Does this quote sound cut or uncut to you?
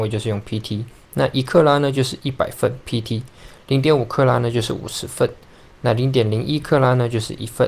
uncut